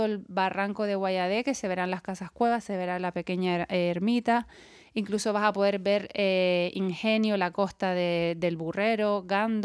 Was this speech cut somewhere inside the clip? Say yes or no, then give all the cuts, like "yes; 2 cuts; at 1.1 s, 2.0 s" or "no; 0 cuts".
no; 0 cuts